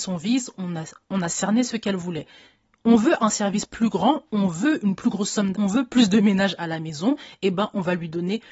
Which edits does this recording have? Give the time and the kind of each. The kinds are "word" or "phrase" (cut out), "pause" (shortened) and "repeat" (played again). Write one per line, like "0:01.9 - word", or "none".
0:05.5 - word